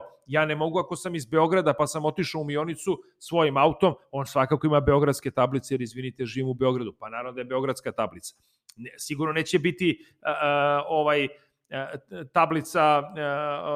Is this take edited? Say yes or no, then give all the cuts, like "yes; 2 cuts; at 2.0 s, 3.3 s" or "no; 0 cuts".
no; 0 cuts